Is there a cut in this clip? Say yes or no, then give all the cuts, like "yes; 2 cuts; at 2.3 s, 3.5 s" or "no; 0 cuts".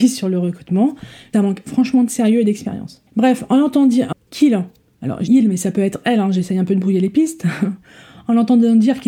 yes; 4 cuts; at 1.3 s, 3.1 s, 4.1 s, 5.3 s